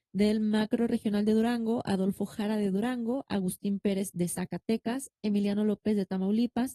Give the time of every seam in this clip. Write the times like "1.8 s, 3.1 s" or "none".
none